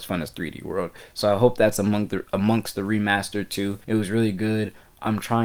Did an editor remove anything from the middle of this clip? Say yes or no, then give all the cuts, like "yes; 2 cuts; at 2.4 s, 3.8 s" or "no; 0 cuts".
yes; 1 cut; at 3.8 s